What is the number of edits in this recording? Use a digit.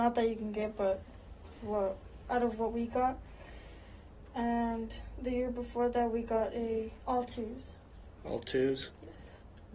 0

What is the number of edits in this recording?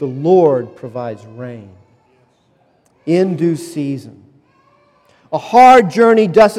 0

